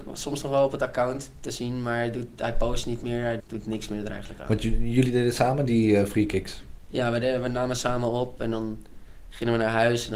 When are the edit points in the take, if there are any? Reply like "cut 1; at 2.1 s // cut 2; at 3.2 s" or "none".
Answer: cut 1; at 3.4 s